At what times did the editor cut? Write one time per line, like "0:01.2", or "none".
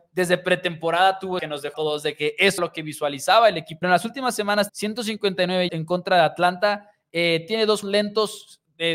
0:01.4
0:01.7
0:02.6
0:03.8
0:04.7
0:05.7
0:07.8